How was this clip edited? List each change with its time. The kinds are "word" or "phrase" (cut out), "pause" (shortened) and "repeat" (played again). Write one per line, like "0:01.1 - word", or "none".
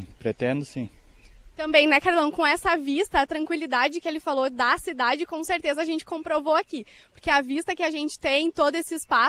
none